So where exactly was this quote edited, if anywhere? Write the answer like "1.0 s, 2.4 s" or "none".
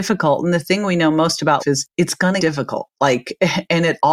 1.6 s, 2.4 s